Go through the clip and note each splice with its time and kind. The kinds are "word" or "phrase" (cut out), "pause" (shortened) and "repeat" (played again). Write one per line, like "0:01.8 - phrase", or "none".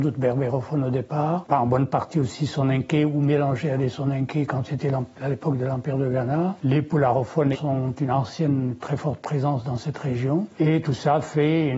0:07.5 - word